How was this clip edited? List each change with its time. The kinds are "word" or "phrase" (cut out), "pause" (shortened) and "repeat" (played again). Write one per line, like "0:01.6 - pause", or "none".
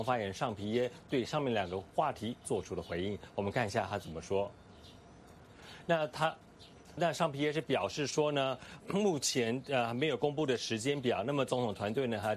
0:07.0 - word
0:08.8 - word